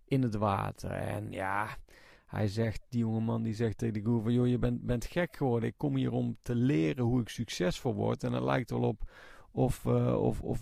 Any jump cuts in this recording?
no; 0 cuts

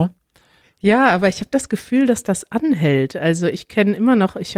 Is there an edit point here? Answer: no; 0 cuts

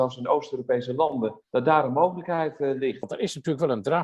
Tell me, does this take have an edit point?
yes; 1 cut; at 1.4 s

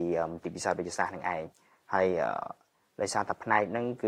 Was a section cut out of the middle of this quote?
no; 0 cuts

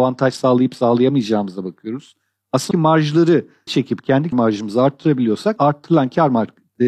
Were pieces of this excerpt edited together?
yes; 4 cuts; at 2.7 s, 3.7 s, 4.3 s, 5.6 s

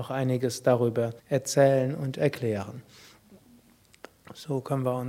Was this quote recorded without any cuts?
no; 1 cut; at 1.2 s

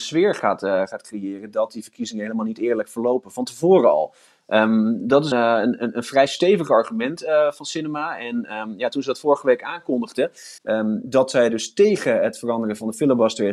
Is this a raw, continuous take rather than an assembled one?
no; 2 cuts; at 5.3 s, 10.6 s

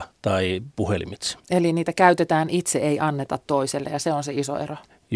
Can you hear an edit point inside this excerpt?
yes; 1 cut; at 1.4 s

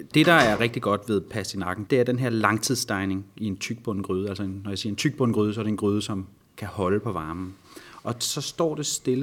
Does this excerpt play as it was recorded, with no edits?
yes; 0 cuts

